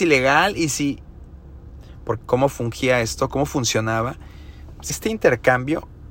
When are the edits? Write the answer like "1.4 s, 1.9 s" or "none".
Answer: 2.2 s, 4.9 s